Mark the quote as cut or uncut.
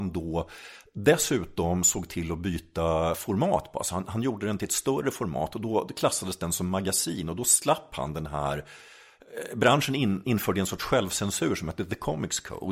uncut